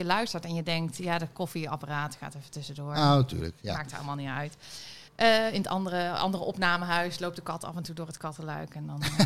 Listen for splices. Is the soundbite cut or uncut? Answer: cut